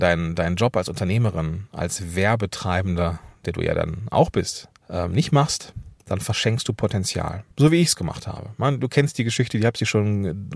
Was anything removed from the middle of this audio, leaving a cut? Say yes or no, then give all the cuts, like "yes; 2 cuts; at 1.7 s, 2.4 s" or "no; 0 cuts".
yes; 3 cuts; at 4.8 s, 6.0 s, 7.5 s